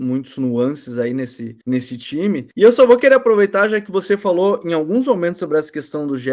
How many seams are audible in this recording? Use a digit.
2